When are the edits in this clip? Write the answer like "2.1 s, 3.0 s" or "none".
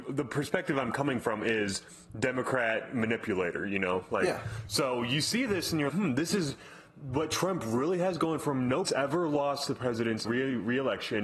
5.9 s, 8.8 s, 10.2 s